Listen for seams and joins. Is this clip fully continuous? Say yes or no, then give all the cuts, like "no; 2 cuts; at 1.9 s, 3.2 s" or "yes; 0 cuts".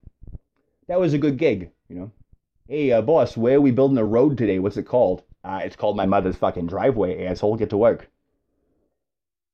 yes; 0 cuts